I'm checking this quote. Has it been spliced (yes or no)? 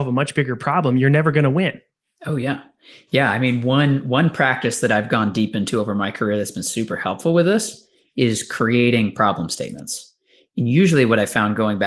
no